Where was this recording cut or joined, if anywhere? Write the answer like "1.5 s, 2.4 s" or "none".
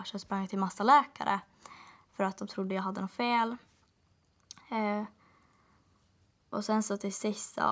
none